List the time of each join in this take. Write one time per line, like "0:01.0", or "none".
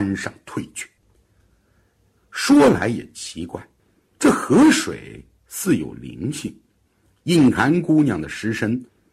none